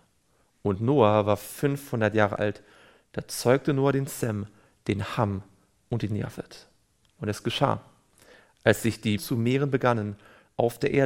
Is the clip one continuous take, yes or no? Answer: no